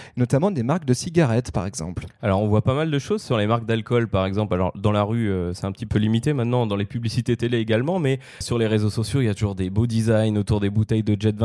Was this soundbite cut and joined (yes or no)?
yes